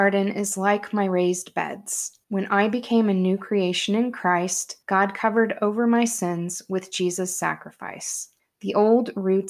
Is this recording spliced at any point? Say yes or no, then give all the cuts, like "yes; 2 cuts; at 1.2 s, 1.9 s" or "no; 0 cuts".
yes; 3 cuts; at 2.2 s, 4.8 s, 8.4 s